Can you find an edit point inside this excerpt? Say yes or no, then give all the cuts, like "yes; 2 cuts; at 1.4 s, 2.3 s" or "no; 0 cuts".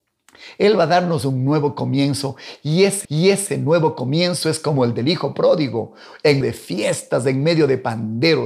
yes; 2 cuts; at 3.0 s, 6.4 s